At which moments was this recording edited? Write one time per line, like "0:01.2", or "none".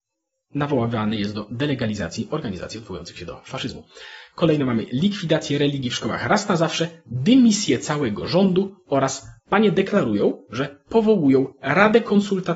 none